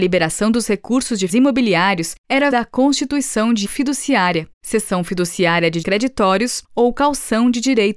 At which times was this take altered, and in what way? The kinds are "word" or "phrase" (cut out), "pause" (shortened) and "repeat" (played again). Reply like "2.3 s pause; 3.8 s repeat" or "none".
1.3 s word; 2.5 s word; 3.6 s word; 4.5 s word; 5.8 s word